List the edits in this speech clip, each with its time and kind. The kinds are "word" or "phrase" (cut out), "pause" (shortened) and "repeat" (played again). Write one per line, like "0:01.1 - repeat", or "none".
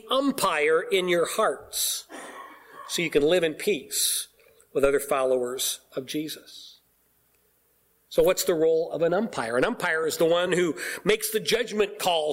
none